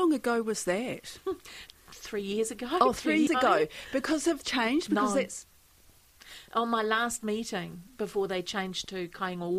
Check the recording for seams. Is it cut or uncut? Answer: cut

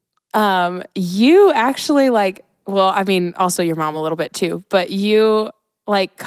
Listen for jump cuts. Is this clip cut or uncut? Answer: uncut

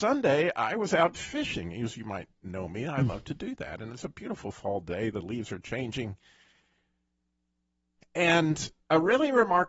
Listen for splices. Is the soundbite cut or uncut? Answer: uncut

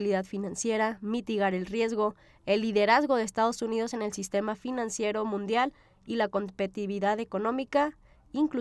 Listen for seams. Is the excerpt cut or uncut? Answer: uncut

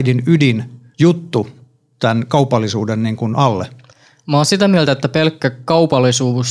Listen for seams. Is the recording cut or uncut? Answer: uncut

